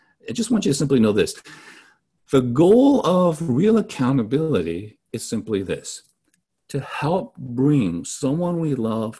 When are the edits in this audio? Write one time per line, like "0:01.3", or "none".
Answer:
none